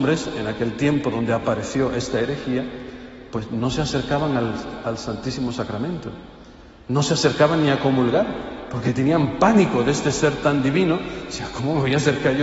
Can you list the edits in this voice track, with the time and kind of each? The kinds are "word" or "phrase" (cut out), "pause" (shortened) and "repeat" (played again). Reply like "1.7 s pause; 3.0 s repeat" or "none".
none